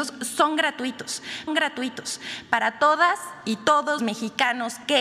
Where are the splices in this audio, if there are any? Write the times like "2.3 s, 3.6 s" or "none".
1.5 s, 4.0 s